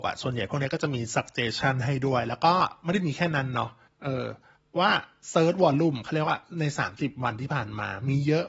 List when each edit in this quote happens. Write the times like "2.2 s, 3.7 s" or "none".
3.9 s, 4.6 s